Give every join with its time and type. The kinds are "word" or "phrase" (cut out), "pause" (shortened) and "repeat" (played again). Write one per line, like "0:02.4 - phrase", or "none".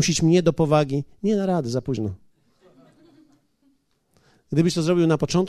none